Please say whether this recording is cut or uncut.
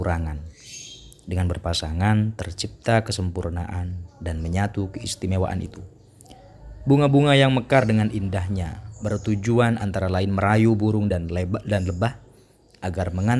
uncut